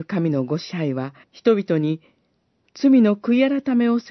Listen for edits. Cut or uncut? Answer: cut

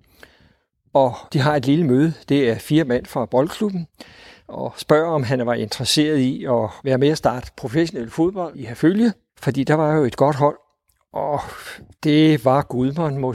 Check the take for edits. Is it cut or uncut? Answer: uncut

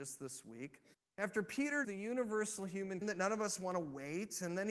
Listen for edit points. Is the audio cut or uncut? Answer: cut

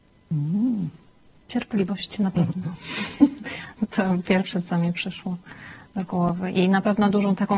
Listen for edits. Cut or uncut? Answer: uncut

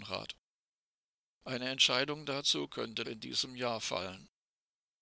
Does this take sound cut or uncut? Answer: cut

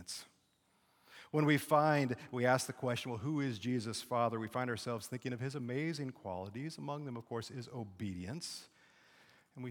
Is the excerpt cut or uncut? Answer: uncut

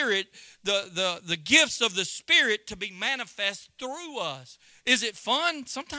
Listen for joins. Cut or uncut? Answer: uncut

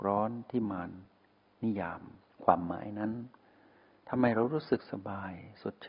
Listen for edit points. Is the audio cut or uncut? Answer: uncut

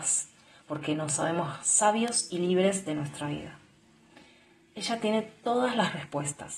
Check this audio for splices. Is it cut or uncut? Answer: uncut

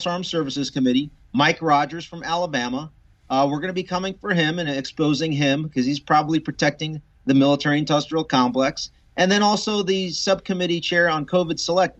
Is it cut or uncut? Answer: uncut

